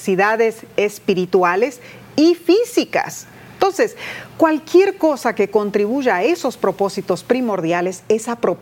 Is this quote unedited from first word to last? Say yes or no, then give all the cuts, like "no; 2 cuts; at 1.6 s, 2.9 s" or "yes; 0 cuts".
yes; 0 cuts